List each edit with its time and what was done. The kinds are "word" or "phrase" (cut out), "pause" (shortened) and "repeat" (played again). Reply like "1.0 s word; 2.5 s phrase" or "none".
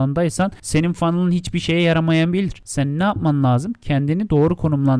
none